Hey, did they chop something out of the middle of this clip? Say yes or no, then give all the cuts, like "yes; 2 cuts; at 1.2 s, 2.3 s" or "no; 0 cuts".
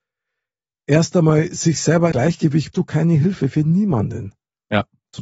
yes; 2 cuts; at 2.1 s, 2.7 s